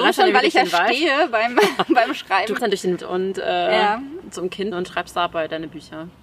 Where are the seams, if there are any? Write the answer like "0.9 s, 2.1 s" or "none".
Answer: 2.6 s, 3.0 s, 4.7 s

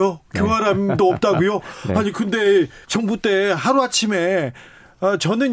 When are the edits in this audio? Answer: 2.8 s

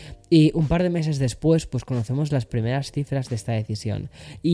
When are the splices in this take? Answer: none

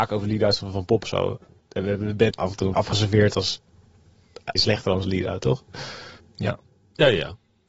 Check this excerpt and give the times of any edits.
1.0 s, 2.3 s, 2.7 s, 4.6 s, 6.2 s

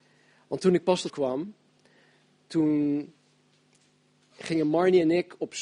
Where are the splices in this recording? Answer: 1.1 s

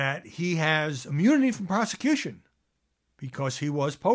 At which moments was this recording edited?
none

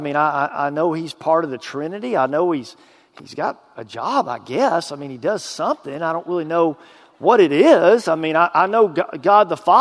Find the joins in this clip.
none

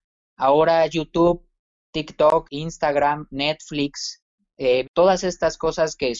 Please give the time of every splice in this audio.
2.4 s, 4.8 s

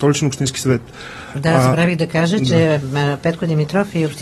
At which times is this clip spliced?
none

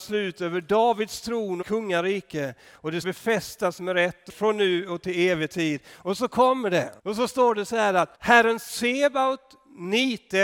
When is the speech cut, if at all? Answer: 1.6 s, 3.0 s, 3.8 s, 4.3 s, 7.0 s, 8.1 s

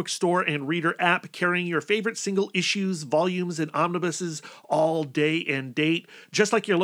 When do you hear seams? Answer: none

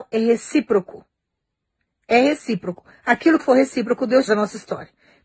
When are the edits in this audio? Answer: 3.4 s, 4.3 s

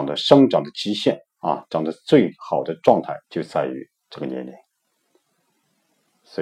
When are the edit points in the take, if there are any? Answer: 3.2 s

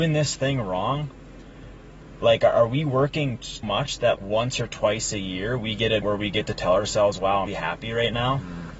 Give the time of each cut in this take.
3.6 s, 4.2 s, 6.0 s, 7.5 s

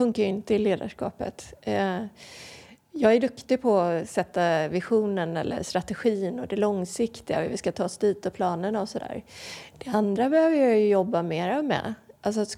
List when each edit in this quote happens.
none

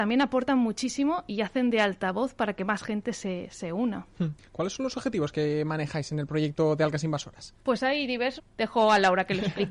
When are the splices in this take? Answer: 1.3 s, 7.6 s, 8.4 s

